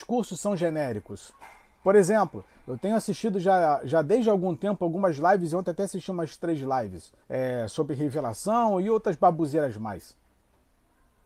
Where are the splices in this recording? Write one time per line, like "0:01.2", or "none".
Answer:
0:07.2